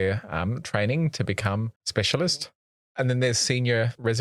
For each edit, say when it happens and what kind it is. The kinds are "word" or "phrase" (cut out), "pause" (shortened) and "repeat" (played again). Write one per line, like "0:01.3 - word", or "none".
0:01.8 - pause

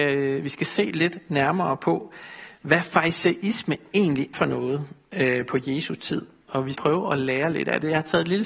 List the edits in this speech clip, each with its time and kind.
0:04.3 - word
0:06.7 - word

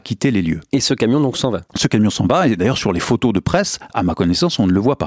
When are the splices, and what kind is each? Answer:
none

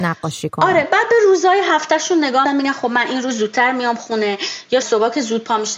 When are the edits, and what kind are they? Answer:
0:02.4 - phrase
0:04.8 - word

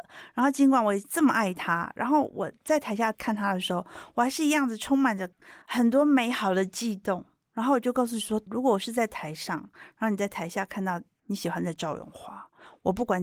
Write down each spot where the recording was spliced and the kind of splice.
0:05.6 - pause
0:08.5 - word

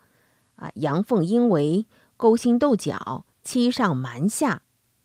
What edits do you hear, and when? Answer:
none

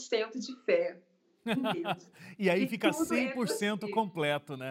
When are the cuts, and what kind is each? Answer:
none

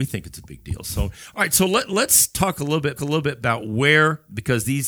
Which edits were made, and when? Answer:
0:03.0 - repeat

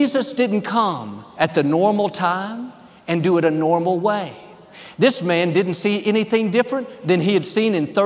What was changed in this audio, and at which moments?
none

